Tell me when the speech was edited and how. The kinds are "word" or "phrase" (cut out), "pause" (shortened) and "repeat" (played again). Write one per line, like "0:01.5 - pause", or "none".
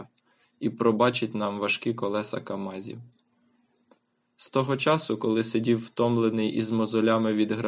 none